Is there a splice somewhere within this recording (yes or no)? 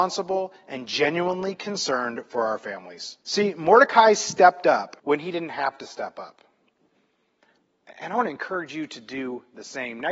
yes